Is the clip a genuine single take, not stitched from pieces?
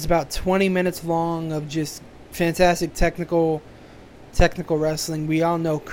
yes; 0 cuts

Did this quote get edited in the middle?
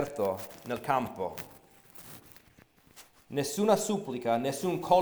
no; 0 cuts

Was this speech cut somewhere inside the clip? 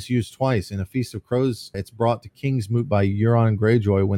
yes; 1 cut; at 1.7 s

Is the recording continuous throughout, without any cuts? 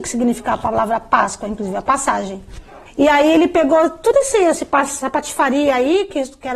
no; 1 cut; at 2.9 s

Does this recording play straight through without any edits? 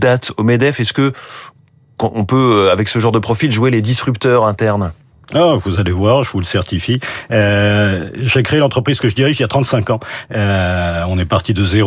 yes; 0 cuts

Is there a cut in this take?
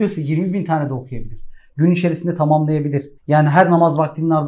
yes; 1 cut; at 3.2 s

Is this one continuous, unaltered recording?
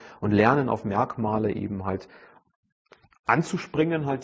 yes; 0 cuts

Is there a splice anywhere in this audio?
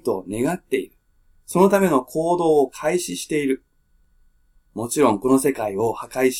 no; 0 cuts

